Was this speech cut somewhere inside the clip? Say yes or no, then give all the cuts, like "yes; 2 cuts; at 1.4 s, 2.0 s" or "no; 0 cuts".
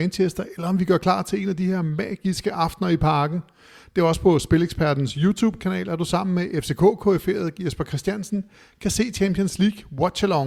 no; 0 cuts